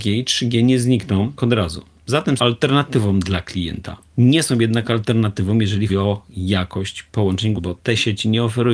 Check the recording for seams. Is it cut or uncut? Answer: cut